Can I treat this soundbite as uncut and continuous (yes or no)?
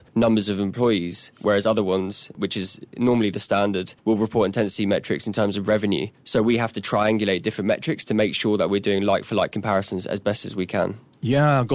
yes